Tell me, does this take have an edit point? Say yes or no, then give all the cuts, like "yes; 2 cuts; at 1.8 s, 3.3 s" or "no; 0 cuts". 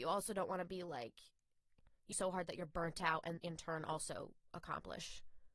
yes; 2 cuts; at 2.1 s, 3.4 s